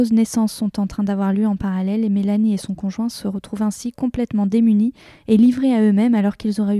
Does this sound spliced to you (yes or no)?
no